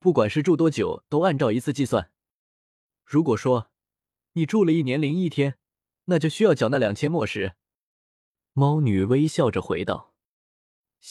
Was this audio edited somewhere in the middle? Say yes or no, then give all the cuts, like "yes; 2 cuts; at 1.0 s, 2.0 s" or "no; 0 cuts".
no; 0 cuts